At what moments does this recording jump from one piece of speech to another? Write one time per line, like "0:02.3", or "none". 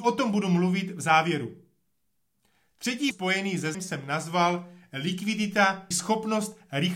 0:03.1
0:03.7
0:05.9

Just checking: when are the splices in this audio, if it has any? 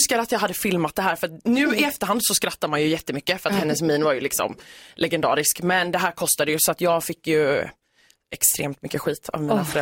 none

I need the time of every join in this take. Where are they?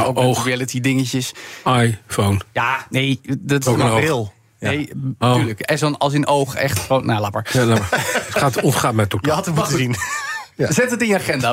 0:02.5

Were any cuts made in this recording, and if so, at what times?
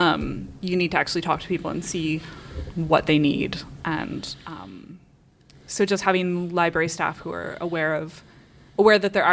none

